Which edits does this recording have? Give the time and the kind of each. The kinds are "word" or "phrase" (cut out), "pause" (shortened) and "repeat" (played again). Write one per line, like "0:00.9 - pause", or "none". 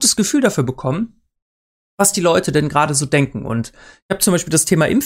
none